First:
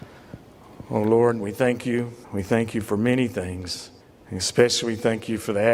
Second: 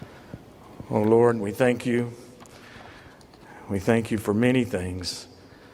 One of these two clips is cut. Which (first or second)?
first